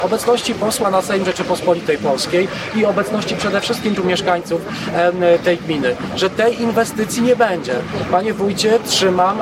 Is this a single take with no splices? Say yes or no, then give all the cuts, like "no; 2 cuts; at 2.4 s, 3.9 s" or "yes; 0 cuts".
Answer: no; 1 cut; at 4.0 s